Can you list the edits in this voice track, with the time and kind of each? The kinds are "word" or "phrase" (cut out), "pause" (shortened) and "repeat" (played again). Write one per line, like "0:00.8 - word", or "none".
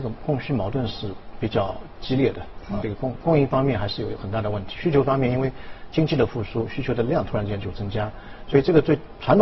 0:02.8 - word